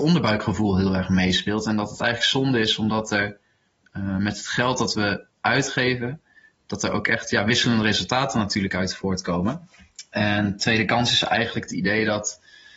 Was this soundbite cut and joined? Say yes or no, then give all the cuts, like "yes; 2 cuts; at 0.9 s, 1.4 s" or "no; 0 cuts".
no; 0 cuts